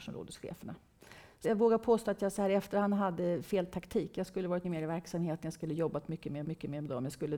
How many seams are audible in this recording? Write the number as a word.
three